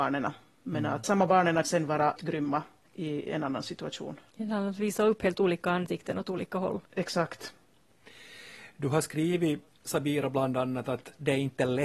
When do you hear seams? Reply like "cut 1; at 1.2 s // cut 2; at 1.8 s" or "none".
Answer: cut 1; at 1.0 s // cut 2; at 1.6 s // cut 3; at 2.2 s // cut 4; at 2.8 s // cut 5; at 6.8 s